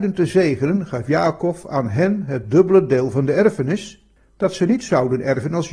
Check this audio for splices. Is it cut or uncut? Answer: uncut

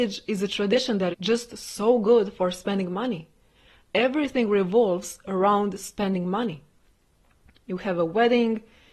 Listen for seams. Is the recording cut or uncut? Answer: cut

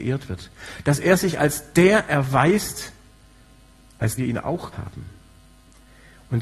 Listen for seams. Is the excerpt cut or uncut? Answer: cut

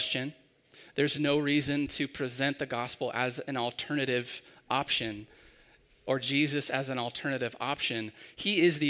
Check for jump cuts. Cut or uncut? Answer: uncut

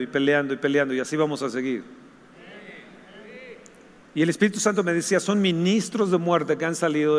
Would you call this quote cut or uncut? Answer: uncut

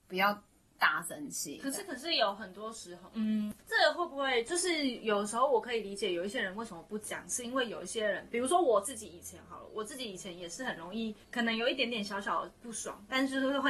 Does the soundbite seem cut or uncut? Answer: cut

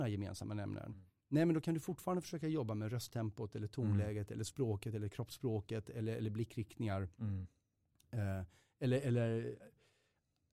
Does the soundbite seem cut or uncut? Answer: uncut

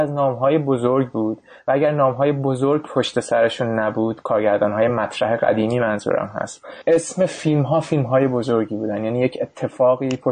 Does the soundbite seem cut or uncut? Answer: uncut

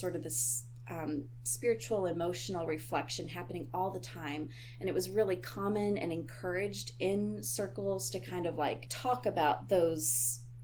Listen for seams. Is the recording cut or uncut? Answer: uncut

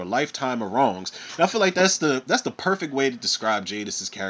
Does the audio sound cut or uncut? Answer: uncut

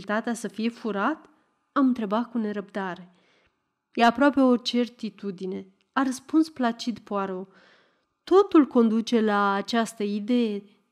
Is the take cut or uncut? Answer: uncut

